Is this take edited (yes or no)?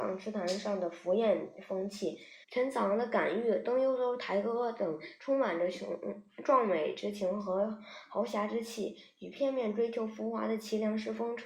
yes